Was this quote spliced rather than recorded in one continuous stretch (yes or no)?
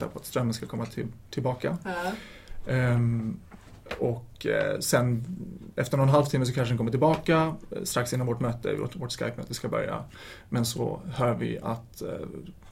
no